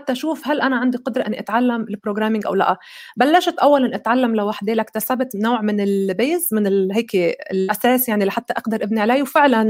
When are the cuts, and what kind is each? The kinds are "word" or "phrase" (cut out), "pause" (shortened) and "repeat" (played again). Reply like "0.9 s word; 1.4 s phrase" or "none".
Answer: none